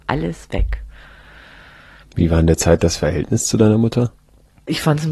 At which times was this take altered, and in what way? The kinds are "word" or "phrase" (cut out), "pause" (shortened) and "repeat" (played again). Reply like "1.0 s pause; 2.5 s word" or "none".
none